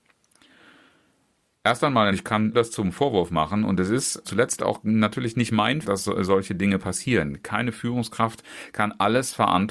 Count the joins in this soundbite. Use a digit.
4